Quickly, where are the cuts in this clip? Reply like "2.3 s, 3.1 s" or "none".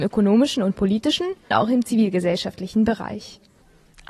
1.5 s